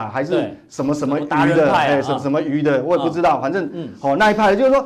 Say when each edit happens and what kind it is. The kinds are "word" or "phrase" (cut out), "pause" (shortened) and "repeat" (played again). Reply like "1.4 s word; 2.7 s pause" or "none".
none